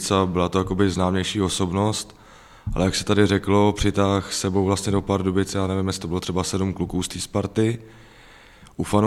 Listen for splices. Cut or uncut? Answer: uncut